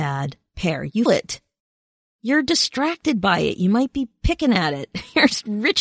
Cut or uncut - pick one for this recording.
cut